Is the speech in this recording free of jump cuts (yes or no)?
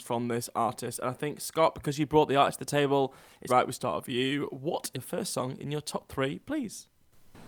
no